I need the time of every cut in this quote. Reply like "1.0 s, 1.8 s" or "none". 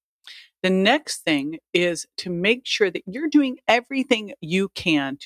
none

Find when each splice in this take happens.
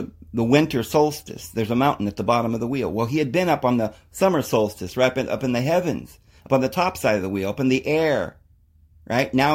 none

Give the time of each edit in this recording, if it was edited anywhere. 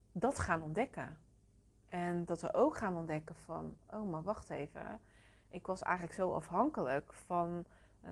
none

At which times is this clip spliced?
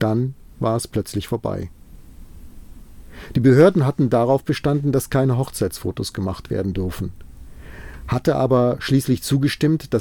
none

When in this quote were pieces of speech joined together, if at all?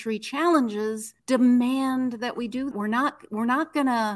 1.2 s, 2.7 s

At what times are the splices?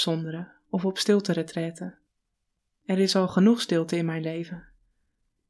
none

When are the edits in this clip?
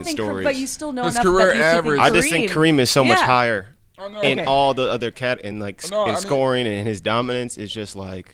none

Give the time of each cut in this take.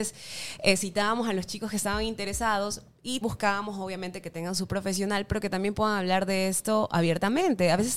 3.2 s, 4.7 s

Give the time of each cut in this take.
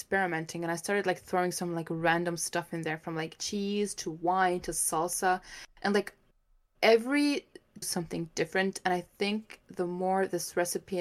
7.8 s

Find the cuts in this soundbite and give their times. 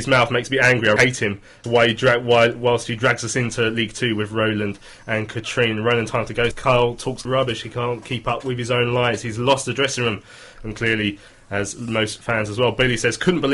1.0 s, 1.6 s, 6.5 s, 7.2 s

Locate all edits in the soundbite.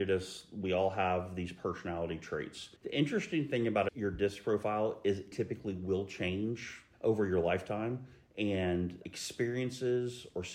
2.8 s, 5.3 s

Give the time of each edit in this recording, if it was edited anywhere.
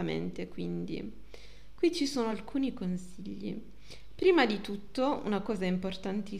none

